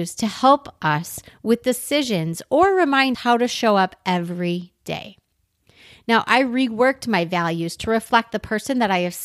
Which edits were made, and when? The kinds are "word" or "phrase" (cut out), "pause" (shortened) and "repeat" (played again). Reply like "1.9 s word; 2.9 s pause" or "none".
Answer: 3.1 s word